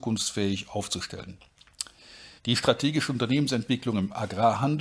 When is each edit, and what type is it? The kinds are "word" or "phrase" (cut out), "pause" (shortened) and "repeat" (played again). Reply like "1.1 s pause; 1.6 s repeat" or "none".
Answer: 2.4 s pause

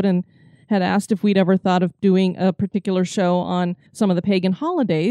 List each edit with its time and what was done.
3.9 s pause

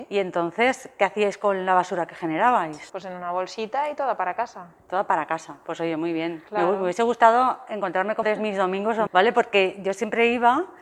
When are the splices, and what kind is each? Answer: 8.2 s phrase; 9.1 s phrase

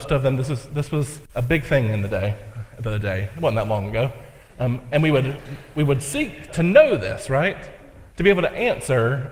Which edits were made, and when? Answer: 1.3 s pause; 6.5 s word; 8.1 s pause

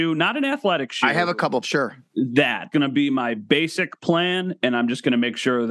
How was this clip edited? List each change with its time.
1.6 s word; 2.7 s word

